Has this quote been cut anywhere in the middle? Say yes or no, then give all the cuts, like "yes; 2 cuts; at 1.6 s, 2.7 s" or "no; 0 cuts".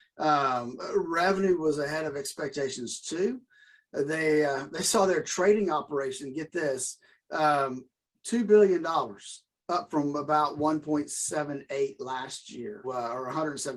yes; 1 cut; at 12.8 s